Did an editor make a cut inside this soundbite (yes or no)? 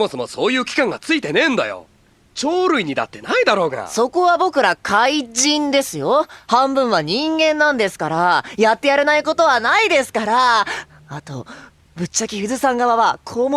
no